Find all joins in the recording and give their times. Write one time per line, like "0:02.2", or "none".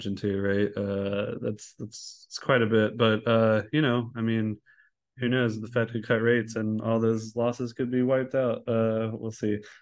none